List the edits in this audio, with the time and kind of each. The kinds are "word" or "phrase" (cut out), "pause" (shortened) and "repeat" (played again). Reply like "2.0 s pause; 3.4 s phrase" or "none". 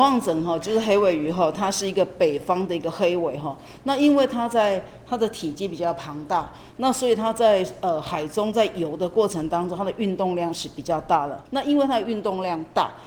11.5 s pause